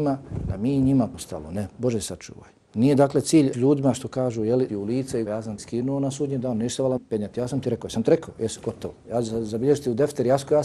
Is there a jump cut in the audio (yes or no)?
yes